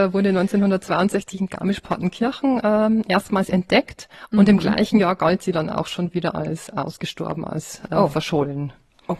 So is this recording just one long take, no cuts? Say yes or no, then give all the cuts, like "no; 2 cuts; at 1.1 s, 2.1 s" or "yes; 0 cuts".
yes; 0 cuts